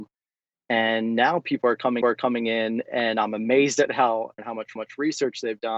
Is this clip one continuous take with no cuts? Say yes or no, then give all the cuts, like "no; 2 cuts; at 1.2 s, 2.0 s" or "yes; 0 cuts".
no; 3 cuts; at 2.0 s, 4.4 s, 4.8 s